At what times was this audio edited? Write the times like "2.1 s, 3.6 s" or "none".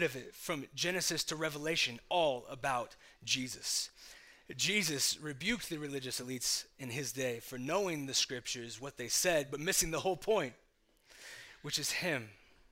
none